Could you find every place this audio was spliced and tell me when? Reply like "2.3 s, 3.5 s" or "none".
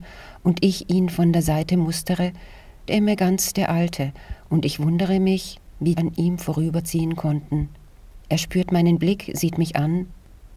2.9 s, 5.9 s

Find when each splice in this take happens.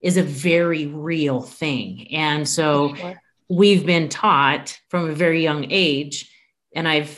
3.4 s, 4.8 s

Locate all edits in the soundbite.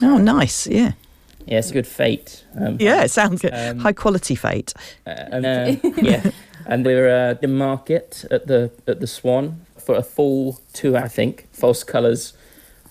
1.7 s, 2.8 s, 3.4 s, 5.4 s, 6.8 s, 7.4 s, 9.8 s, 11.0 s

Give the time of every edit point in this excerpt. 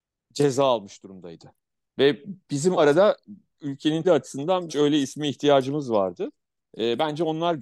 2.8 s, 4.0 s, 4.7 s

